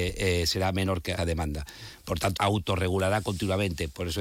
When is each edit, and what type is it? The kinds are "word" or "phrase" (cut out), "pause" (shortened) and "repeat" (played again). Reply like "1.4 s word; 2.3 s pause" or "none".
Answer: 1.2 s phrase; 2.4 s word